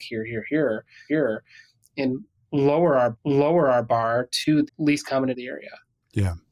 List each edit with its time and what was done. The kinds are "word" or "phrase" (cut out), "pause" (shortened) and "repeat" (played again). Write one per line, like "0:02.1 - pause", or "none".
0:01.1 - repeat
0:03.1 - repeat
0:04.7 - word
0:05.3 - word